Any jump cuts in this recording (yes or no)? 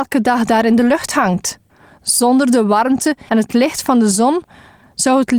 yes